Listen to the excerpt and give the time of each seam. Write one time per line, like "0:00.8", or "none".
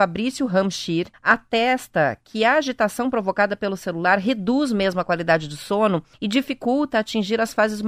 0:01.1
0:06.1